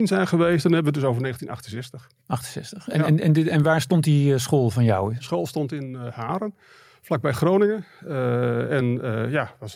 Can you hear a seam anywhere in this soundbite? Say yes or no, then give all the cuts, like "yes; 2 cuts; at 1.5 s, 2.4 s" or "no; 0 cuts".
no; 0 cuts